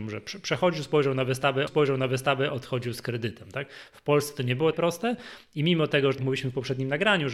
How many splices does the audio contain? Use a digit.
3